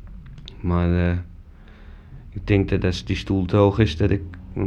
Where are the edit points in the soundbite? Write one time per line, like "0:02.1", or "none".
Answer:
none